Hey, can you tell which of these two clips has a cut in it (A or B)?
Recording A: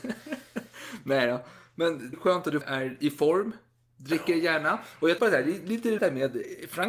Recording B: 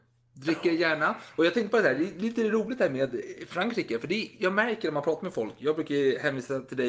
A